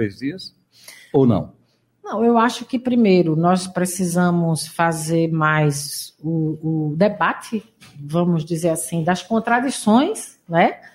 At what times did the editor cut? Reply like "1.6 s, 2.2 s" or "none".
none